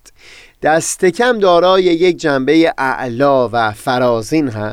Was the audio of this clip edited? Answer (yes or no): no